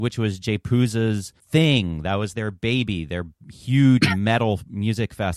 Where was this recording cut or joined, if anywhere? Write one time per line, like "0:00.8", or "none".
0:01.4